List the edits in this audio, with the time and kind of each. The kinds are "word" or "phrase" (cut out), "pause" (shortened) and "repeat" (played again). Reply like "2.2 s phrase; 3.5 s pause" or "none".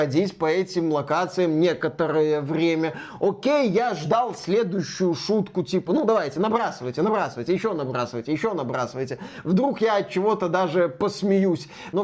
none